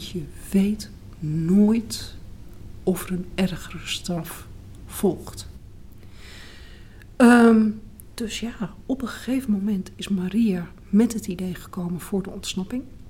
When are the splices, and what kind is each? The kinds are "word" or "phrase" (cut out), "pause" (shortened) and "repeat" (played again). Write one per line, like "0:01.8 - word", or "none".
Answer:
none